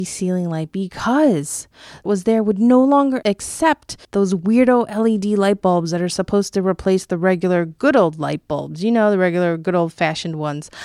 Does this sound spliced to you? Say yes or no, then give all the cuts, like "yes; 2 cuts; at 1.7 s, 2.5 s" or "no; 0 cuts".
yes; 2 cuts; at 2.0 s, 4.0 s